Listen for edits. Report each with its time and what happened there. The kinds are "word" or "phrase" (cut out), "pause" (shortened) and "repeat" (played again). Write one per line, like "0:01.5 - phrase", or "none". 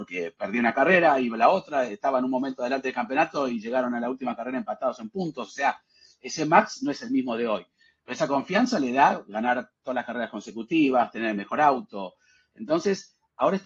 none